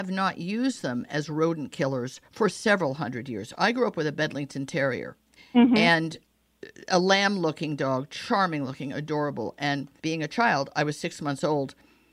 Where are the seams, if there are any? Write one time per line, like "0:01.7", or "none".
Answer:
0:02.2
0:05.4
0:10.0